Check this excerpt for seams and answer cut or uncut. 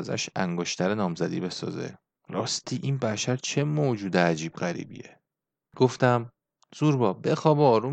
uncut